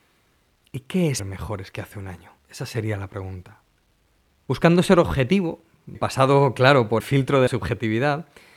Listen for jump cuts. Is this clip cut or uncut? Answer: cut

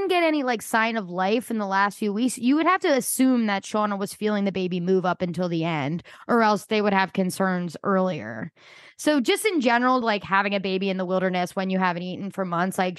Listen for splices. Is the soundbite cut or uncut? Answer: uncut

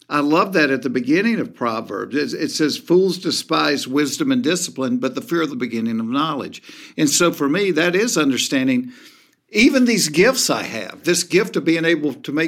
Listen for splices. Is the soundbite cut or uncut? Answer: cut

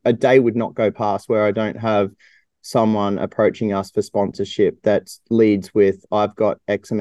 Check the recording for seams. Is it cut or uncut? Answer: uncut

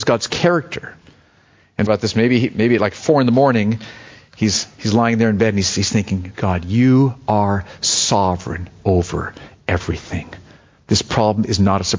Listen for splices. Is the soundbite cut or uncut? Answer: cut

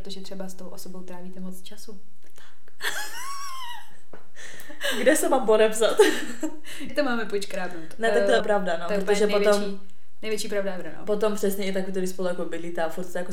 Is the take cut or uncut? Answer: cut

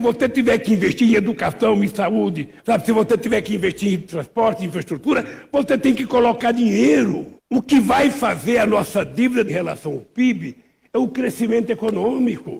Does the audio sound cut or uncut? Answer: cut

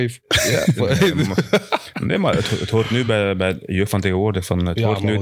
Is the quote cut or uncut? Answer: uncut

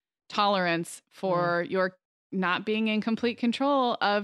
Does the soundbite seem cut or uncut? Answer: uncut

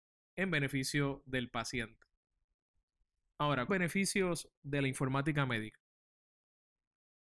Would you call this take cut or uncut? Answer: cut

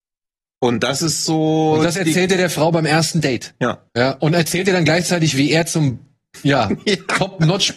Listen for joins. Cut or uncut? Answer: cut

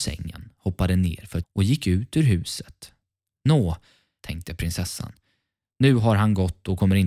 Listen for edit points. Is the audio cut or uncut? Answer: cut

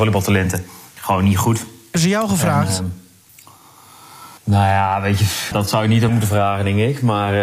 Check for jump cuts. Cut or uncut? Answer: cut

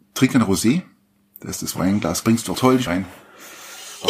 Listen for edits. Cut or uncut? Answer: cut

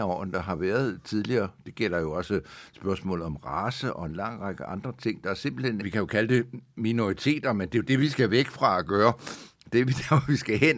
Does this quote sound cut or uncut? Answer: cut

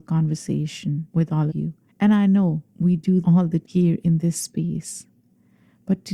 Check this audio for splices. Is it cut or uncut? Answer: cut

